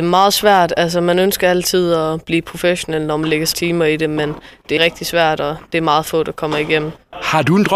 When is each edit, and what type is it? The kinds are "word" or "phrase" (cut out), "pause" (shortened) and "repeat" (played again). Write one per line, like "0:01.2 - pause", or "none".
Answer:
0:03.5 - word
0:04.8 - word